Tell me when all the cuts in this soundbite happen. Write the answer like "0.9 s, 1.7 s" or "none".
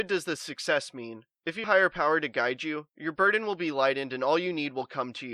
1.6 s

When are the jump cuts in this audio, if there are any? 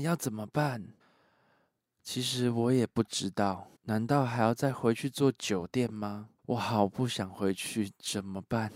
1.0 s, 3.7 s, 6.4 s

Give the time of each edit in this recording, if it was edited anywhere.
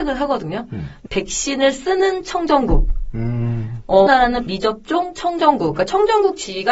1.1 s, 4.1 s, 4.5 s

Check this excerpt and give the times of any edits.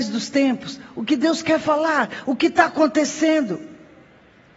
none

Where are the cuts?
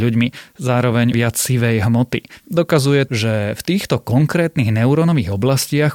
1.1 s, 3.1 s

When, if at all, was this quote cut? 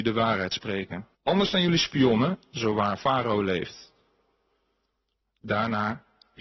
1.1 s

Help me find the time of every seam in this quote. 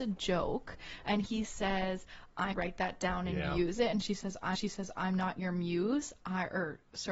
2.5 s, 4.5 s

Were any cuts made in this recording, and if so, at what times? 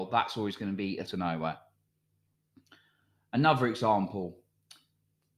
1.1 s

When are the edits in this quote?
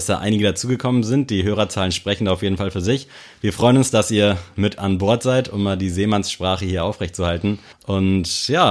7.7 s

